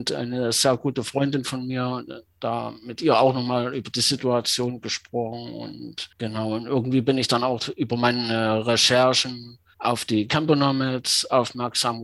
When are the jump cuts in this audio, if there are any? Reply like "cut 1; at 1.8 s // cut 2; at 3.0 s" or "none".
cut 1; at 6.1 s // cut 2; at 9.7 s